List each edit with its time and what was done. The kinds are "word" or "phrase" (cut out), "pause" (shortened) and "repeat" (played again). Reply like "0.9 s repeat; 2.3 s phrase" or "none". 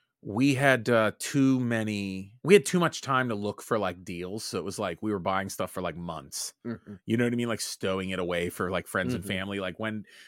2.4 s pause